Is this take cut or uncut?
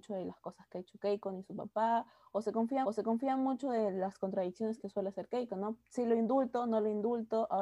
cut